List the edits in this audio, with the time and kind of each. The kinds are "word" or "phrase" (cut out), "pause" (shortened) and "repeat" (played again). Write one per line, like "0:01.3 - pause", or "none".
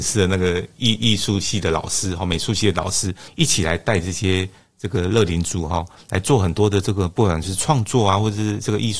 0:03.3 - word